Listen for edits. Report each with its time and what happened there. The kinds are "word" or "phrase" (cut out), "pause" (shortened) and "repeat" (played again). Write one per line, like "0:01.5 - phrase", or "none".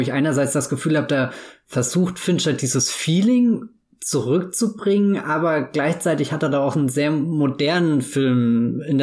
none